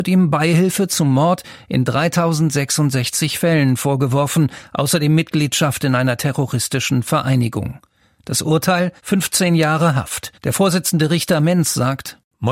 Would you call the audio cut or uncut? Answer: cut